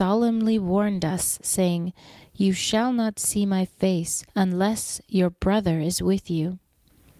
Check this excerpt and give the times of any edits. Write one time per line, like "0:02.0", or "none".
0:04.3